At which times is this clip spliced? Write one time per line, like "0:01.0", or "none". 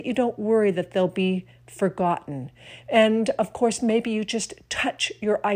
none